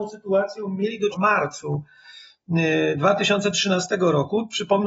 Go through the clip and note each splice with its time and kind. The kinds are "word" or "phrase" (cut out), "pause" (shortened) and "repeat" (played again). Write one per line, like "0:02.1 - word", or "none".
0:01.1 - word